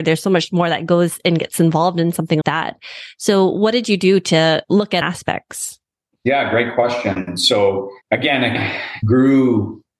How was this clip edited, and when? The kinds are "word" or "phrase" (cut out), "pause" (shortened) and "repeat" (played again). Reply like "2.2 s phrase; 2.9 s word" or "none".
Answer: 2.4 s word; 5.0 s phrase; 8.0 s pause; 8.6 s word